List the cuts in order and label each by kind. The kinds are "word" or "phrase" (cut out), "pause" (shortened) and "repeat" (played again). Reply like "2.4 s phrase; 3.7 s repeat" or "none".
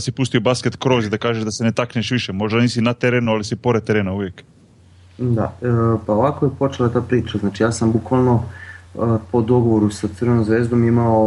none